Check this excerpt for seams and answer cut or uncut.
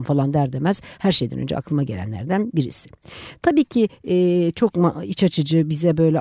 uncut